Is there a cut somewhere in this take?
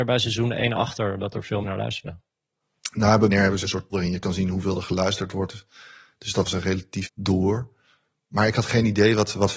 yes; 6 cuts; at 1.6 s, 3.3 s, 3.6 s, 3.9 s, 6.4 s, 7.0 s

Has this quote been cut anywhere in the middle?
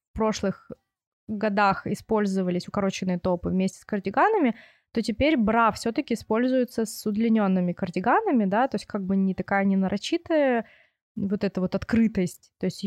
no; 0 cuts

